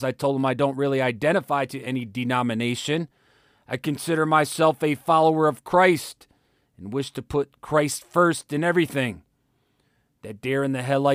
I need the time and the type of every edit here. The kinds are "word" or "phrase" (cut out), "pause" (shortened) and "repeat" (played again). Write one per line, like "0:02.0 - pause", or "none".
none